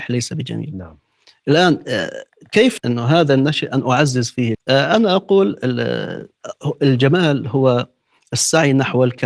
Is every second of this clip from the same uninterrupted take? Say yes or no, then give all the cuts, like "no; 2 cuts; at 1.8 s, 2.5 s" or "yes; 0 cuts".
no; 2 cuts; at 2.8 s, 4.5 s